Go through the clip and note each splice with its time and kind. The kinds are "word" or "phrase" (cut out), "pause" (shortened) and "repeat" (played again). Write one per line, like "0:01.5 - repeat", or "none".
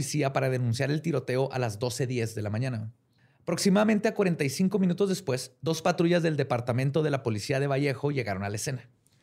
0:03.2 - pause